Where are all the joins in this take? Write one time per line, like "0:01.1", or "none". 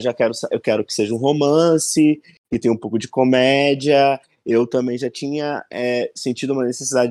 none